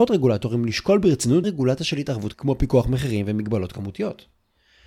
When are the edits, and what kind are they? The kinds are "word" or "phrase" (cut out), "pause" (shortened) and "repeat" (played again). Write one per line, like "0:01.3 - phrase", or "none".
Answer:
0:01.4 - word
0:02.3 - word